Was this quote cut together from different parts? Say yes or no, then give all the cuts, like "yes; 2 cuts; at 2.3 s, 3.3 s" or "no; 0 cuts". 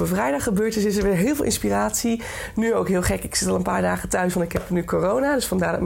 no; 0 cuts